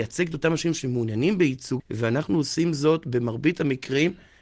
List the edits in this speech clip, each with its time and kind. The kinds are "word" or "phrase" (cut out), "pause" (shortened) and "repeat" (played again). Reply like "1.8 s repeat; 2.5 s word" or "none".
1.8 s word